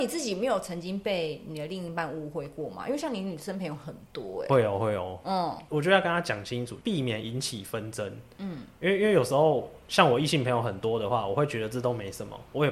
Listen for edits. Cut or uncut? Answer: uncut